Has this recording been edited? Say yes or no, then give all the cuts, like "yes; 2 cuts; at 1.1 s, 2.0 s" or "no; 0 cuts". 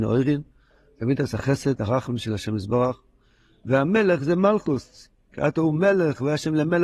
no; 0 cuts